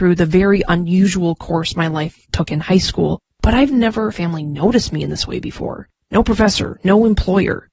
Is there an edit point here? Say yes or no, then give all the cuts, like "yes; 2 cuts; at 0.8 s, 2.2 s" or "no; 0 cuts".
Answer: yes; 1 cut; at 4.1 s